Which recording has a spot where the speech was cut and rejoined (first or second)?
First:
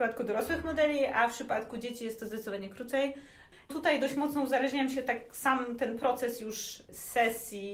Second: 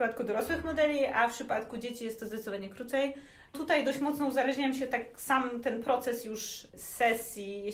second